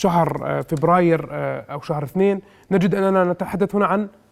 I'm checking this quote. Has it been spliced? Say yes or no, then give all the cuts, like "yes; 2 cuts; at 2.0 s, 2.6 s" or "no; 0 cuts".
no; 0 cuts